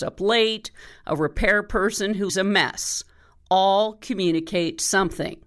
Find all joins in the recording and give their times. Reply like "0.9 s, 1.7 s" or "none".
2.3 s